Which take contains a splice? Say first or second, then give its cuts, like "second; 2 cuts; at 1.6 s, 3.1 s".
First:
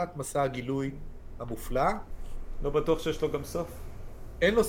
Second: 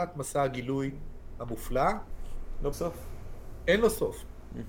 second; 1 cut; at 2.7 s